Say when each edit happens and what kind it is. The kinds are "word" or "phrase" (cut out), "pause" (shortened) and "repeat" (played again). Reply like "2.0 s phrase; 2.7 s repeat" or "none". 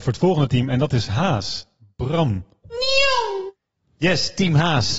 none